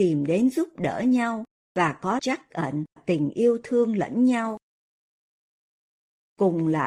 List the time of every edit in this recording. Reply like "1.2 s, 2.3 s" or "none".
2.2 s, 3.0 s